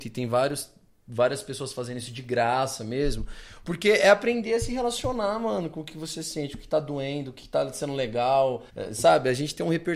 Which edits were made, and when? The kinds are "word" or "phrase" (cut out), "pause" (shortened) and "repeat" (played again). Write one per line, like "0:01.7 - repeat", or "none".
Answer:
0:08.7 - pause